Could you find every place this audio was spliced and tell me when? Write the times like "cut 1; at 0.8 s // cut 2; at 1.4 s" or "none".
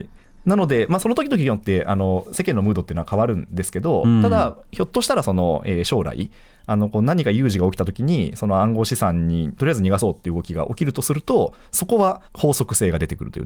cut 1; at 12.3 s